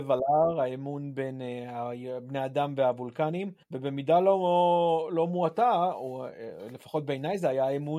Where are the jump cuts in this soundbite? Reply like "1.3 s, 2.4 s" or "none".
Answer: 3.6 s